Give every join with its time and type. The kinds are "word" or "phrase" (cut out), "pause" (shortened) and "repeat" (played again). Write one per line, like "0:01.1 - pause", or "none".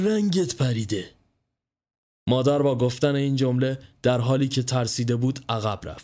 none